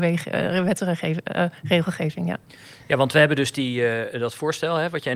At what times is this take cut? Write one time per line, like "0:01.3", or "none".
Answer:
none